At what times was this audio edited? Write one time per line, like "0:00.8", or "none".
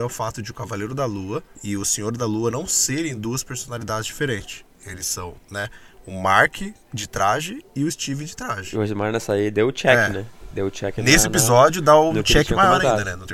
none